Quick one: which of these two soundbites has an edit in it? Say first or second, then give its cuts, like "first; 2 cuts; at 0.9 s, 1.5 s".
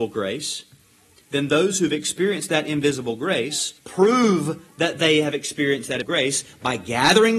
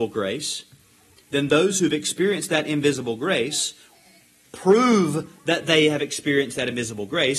first; 2 cuts; at 3.8 s, 6.0 s